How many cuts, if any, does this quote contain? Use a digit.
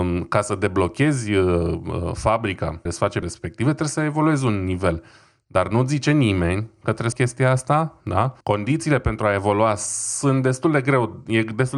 4